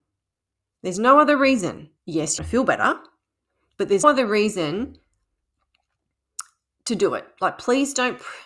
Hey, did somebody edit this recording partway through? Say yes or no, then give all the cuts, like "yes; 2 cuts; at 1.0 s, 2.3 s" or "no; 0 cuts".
yes; 3 cuts; at 2.0 s, 2.4 s, 4.0 s